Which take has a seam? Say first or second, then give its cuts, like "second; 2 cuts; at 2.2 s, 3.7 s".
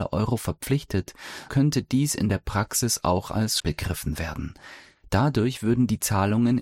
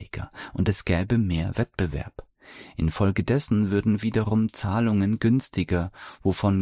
first; 2 cuts; at 1.5 s, 3.6 s